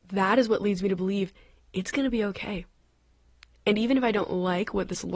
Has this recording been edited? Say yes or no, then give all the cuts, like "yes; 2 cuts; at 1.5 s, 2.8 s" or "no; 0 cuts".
no; 0 cuts